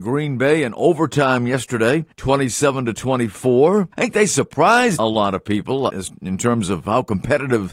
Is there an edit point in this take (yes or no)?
yes